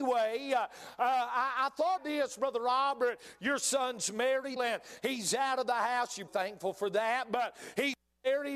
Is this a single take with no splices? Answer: no; 3 cuts; at 2.0 s, 4.6 s, 6.3 s

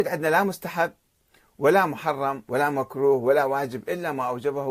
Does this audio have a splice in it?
no; 0 cuts

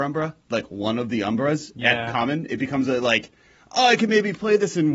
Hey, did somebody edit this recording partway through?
no; 0 cuts

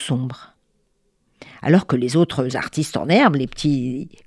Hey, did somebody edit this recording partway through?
no; 0 cuts

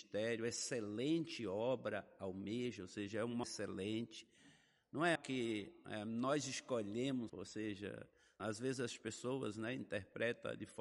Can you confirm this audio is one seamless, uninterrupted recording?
no; 4 cuts; at 3.4 s, 5.2 s, 7.3 s, 8.4 s

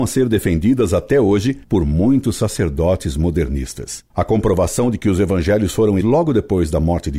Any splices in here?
yes; 3 cuts; at 1.6 s, 4.1 s, 6.0 s

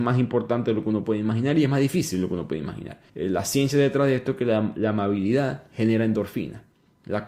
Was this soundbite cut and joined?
yes; 1 cut; at 3.1 s

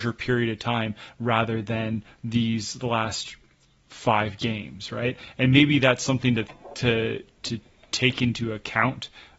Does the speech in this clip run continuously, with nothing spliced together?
yes; 0 cuts

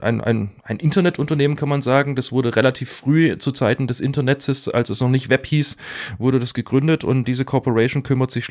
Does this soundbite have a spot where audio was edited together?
yes; 1 cut; at 7.2 s

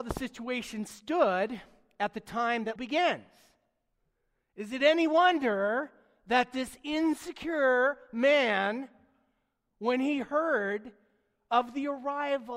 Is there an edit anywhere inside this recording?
yes; 1 cut; at 2.8 s

